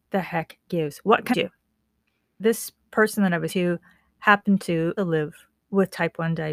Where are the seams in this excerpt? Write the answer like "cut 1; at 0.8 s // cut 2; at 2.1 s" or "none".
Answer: cut 1; at 1.3 s // cut 2; at 2.4 s // cut 3; at 3.5 s // cut 4; at 5.0 s